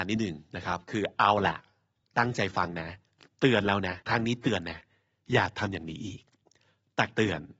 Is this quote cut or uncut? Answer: cut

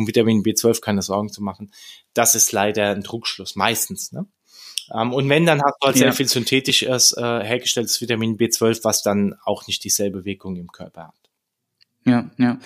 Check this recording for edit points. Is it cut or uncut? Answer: uncut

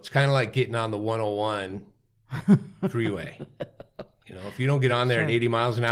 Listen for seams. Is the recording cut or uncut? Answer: uncut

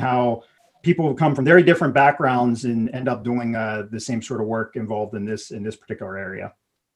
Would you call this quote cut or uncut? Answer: uncut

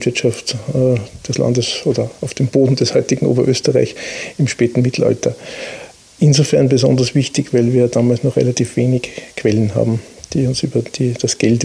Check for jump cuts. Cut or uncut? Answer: uncut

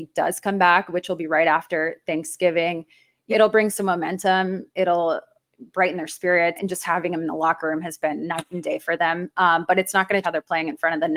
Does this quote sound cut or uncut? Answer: cut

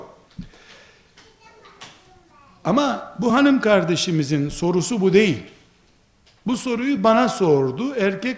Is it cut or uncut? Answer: uncut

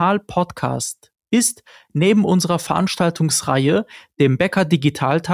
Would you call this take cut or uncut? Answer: uncut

